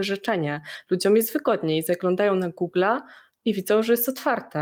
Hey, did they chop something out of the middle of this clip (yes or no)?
no